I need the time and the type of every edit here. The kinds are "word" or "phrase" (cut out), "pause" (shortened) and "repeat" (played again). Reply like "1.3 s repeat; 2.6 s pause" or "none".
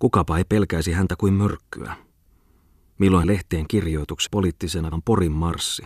3.2 s phrase; 4.3 s word; 4.9 s word